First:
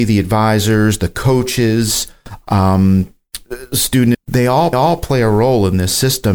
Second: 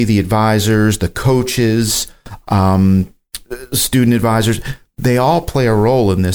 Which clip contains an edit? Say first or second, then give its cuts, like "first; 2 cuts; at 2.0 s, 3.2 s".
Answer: first; 2 cuts; at 4.1 s, 4.7 s